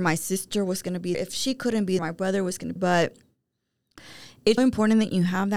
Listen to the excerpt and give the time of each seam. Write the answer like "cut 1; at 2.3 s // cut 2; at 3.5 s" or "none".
cut 1; at 1.1 s // cut 2; at 2.0 s // cut 3; at 2.8 s // cut 4; at 4.6 s